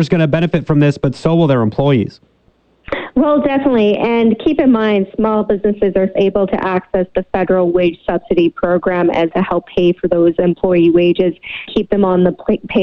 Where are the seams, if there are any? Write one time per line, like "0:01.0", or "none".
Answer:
0:06.2
0:09.3
0:11.7